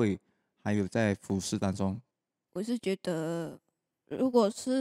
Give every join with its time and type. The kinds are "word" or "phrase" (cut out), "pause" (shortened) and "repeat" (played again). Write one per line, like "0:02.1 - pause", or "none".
none